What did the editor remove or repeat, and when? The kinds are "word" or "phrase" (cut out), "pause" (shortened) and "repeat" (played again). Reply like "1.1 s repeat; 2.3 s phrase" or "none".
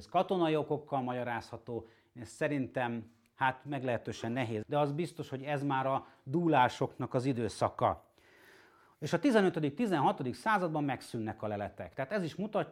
4.6 s word